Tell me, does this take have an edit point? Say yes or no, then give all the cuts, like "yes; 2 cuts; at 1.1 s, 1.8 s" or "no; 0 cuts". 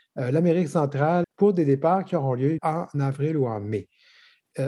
yes; 2 cuts; at 1.2 s, 2.6 s